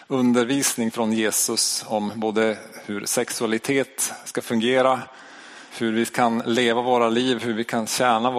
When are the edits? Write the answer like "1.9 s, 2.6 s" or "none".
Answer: 5.7 s